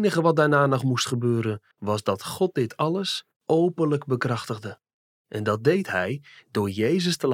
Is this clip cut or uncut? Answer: cut